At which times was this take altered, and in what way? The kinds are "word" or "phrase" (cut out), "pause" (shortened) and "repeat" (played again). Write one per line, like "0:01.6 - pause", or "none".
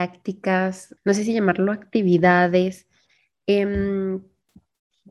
0:01.0 - word